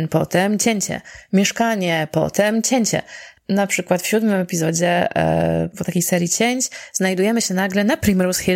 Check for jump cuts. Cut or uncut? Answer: uncut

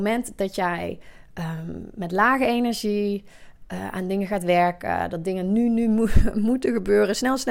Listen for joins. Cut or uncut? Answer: uncut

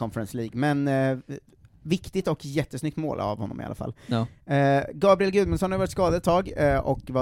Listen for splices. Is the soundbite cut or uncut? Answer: uncut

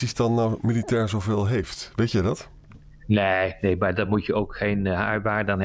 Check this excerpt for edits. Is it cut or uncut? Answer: uncut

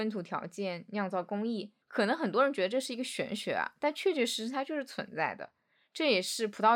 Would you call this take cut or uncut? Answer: cut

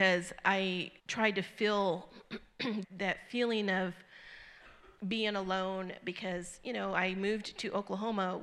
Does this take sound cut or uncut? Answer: cut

